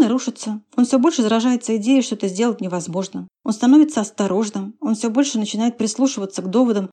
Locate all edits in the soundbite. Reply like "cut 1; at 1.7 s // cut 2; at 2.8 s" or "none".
cut 1; at 3.3 s